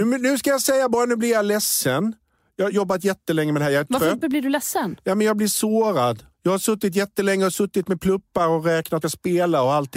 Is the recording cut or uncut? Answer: cut